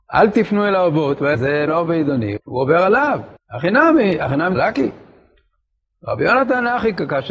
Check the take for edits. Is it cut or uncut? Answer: cut